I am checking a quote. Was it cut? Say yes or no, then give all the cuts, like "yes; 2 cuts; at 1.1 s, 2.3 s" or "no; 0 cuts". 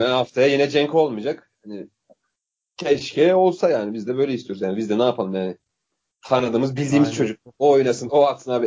no; 0 cuts